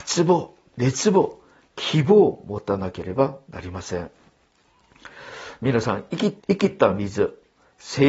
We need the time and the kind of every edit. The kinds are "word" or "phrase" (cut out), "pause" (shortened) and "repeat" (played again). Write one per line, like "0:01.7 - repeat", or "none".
0:06.4 - pause